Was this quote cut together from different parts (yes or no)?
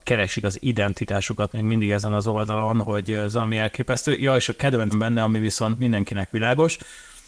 yes